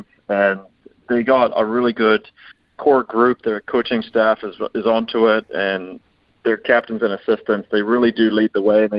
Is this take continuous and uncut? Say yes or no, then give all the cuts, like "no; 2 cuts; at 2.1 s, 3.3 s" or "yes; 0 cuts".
yes; 0 cuts